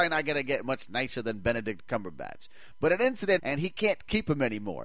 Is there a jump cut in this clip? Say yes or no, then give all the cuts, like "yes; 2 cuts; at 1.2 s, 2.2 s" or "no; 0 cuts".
yes; 1 cut; at 3.4 s